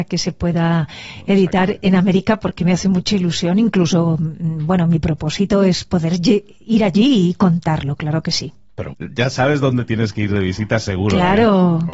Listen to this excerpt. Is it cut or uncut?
cut